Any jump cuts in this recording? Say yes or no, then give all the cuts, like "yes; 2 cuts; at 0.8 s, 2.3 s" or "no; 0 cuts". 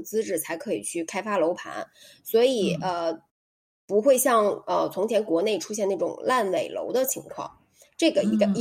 no; 0 cuts